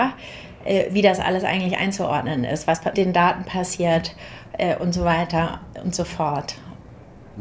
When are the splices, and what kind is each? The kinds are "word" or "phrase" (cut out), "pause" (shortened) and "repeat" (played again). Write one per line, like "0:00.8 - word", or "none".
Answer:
0:02.9 - word